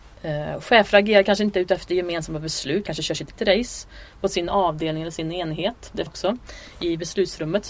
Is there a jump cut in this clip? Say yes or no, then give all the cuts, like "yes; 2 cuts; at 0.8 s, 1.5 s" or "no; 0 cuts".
yes; 3 cuts; at 2.9 s, 3.4 s, 6.1 s